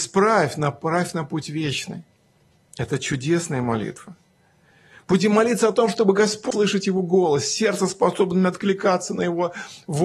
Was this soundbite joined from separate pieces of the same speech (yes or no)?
no